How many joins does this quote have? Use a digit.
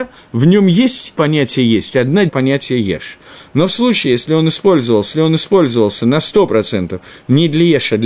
3